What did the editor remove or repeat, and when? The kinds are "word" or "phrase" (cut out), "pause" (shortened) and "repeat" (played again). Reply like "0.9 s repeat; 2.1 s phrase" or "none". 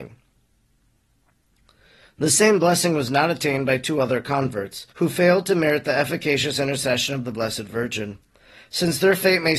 4.9 s pause